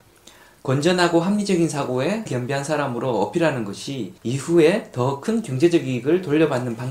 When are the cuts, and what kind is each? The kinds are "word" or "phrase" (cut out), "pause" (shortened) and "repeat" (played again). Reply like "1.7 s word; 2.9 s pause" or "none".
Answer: 2.3 s word; 4.2 s pause

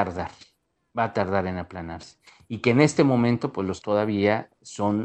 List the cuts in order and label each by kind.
3.8 s word

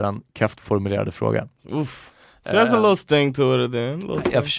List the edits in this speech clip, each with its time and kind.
none

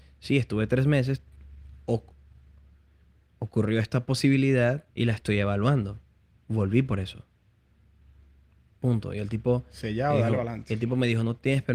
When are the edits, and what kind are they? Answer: 4.9 s pause

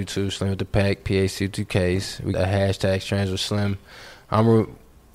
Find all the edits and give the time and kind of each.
2.3 s word

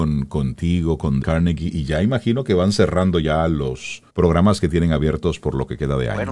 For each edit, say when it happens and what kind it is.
1.2 s word; 4.1 s pause

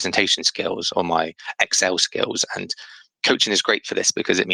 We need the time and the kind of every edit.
none

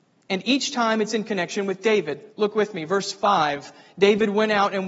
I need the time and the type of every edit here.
none

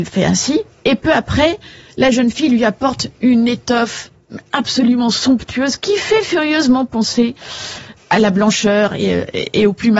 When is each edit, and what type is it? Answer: none

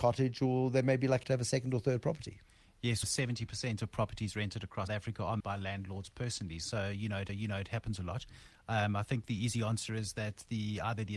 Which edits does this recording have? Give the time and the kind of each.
1.2 s word; 3.0 s word; 4.9 s word; 5.4 s word; 7.3 s repeat

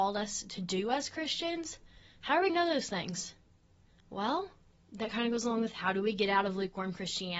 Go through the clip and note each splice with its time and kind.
2.5 s word

